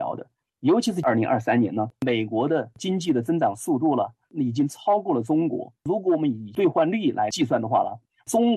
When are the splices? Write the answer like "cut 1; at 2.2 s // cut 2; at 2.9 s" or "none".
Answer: cut 1; at 5.7 s